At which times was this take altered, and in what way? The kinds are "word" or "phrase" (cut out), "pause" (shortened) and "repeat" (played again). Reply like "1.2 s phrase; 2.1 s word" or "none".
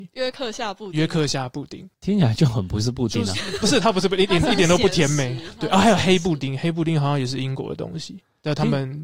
1.9 s pause